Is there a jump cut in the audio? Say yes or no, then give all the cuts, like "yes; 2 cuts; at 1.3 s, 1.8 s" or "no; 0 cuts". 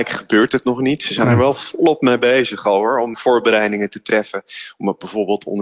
yes; 1 cut; at 3.1 s